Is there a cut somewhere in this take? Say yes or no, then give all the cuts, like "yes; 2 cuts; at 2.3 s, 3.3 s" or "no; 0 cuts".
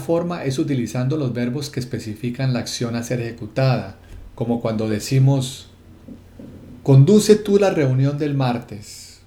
no; 0 cuts